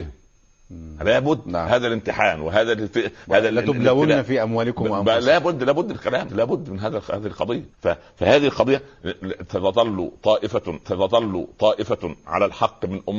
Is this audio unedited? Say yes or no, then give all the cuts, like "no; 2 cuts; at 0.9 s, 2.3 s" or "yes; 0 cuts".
no; 4 cuts; at 5.9 s, 6.3 s, 7.7 s, 10.8 s